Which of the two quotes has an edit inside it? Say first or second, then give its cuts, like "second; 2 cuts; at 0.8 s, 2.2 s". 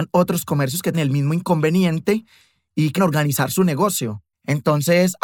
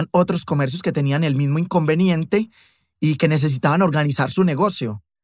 first; 3 cuts; at 0.9 s, 3.0 s, 4.3 s